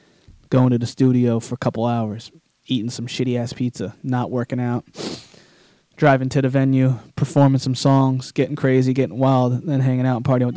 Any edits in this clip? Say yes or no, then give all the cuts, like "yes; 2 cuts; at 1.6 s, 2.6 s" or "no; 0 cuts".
no; 0 cuts